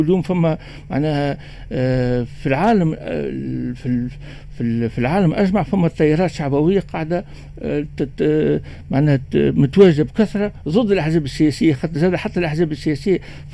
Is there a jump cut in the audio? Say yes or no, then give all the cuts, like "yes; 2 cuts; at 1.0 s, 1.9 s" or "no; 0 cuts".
no; 0 cuts